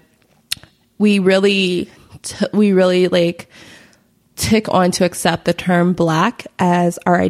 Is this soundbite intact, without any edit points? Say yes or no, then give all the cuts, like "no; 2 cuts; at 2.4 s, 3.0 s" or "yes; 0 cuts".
yes; 0 cuts